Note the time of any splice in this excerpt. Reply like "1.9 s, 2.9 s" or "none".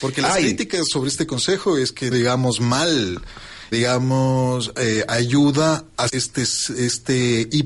2.1 s, 3.7 s, 6.1 s